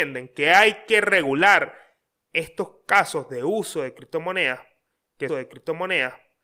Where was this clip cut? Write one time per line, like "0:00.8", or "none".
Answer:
0:05.3